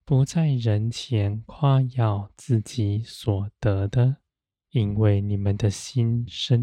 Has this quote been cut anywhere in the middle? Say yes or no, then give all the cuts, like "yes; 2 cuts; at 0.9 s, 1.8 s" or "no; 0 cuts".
yes; 1 cut; at 4.3 s